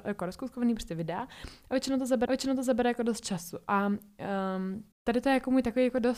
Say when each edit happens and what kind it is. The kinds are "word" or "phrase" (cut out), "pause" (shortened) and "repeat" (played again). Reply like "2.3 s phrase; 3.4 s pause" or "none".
2.3 s repeat; 4.9 s pause